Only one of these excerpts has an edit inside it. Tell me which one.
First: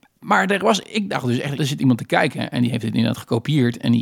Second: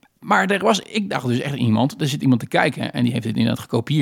first; 1 cut; at 1.5 s

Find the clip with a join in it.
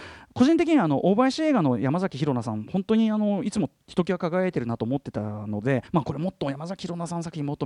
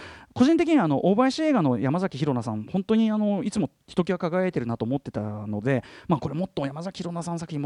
first; 1 cut; at 5.9 s

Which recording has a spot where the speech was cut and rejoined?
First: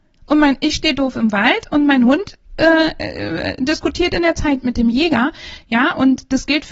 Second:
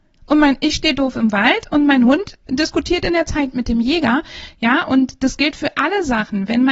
second; 1 cut; at 2.5 s

